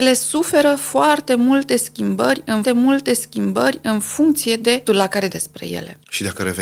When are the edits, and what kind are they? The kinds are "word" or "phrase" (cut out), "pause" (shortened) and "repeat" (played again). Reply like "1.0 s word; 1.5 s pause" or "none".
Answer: 2.6 s repeat; 4.9 s word; 5.3 s word